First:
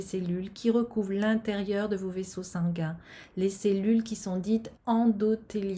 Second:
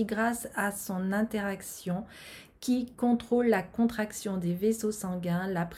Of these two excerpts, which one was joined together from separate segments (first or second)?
first